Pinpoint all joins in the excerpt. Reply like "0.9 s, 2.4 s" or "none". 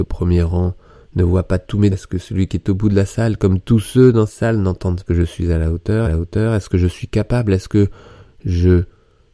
1.9 s, 4.3 s, 5.1 s, 6.0 s